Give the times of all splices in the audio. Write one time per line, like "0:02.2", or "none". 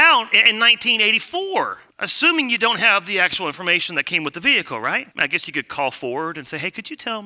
0:01.9
0:05.1